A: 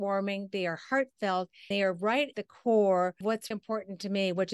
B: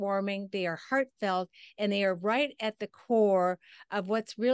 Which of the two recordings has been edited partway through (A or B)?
A